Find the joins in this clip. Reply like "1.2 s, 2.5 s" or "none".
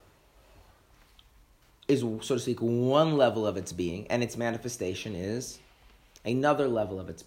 none